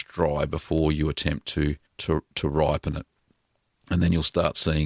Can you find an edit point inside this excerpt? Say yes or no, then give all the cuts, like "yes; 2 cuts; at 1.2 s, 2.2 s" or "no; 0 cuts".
yes; 1 cut; at 1.9 s